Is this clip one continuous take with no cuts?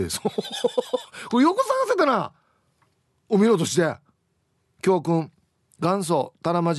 yes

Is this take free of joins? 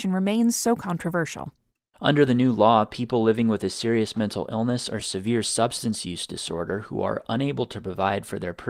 yes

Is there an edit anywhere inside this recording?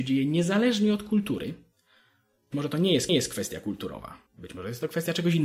yes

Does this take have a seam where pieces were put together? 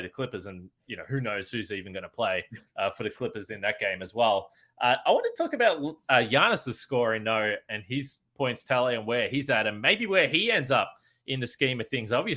no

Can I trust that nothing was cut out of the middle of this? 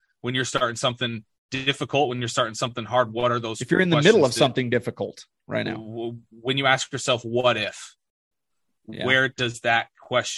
yes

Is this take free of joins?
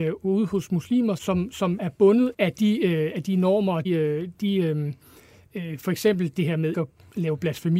no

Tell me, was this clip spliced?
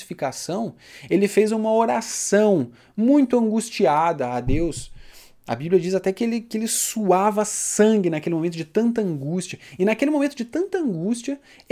no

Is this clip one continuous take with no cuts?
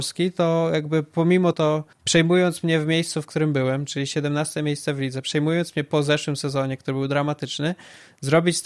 no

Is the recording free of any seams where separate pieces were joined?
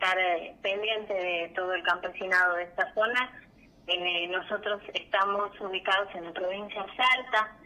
yes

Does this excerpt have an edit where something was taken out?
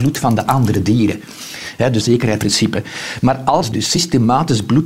yes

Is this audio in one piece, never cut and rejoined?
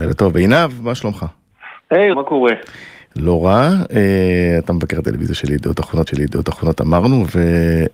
no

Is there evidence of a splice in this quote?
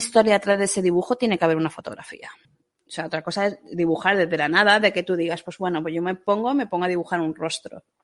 yes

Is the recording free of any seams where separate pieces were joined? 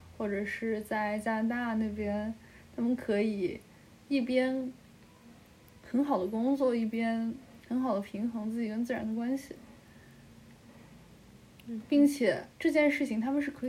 no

